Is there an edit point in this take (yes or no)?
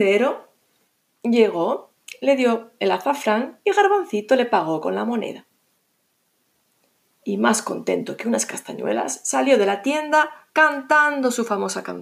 no